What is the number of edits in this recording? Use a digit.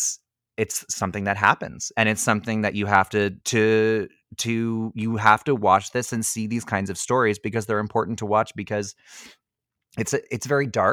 1